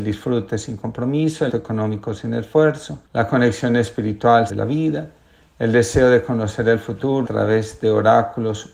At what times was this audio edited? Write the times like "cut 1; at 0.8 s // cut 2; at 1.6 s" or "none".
cut 1; at 1.5 s // cut 2; at 3.1 s // cut 3; at 4.5 s // cut 4; at 7.2 s